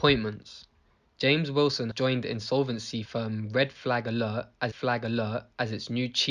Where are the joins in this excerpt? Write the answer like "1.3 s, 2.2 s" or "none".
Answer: 1.9 s, 3.0 s, 4.7 s